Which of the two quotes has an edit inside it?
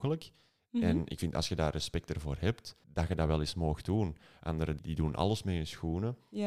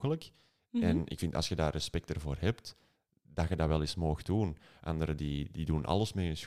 first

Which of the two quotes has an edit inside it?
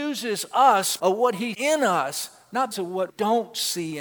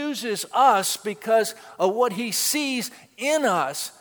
first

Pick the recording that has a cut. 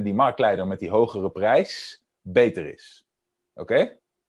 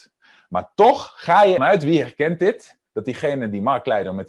second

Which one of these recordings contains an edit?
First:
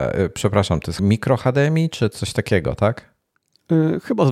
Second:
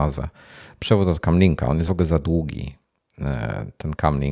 first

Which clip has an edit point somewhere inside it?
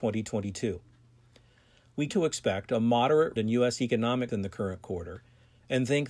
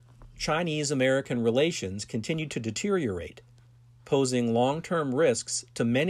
first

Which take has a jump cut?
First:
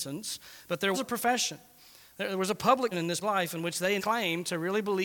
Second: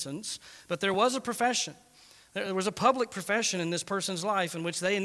first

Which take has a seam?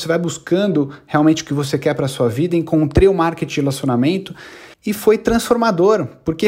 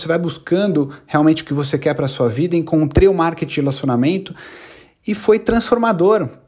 first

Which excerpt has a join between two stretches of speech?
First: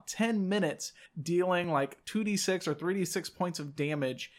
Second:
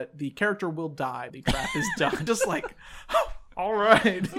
second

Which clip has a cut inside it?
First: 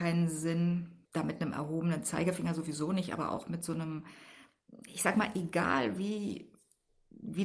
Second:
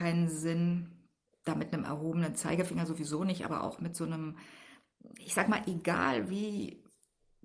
first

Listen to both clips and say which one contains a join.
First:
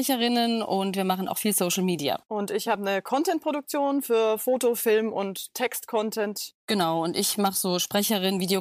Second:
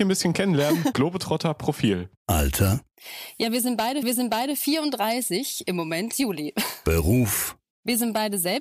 second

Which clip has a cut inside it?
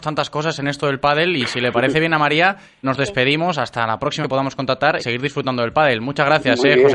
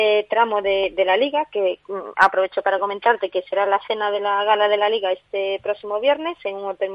first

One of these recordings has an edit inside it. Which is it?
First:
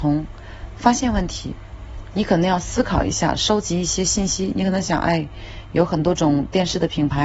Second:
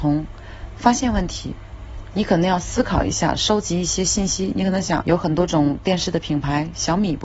second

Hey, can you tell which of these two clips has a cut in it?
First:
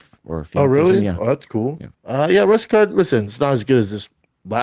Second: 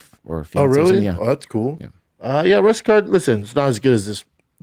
first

